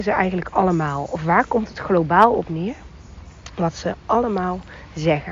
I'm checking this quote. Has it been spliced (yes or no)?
no